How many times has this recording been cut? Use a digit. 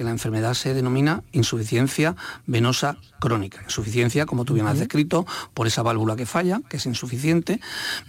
0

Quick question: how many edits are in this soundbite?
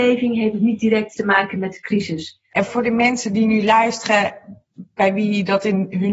2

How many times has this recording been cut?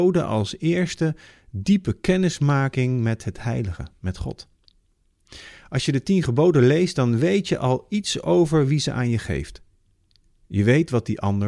0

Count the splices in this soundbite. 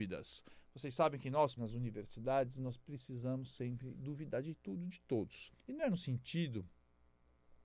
2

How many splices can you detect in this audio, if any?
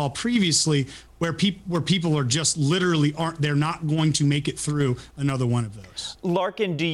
0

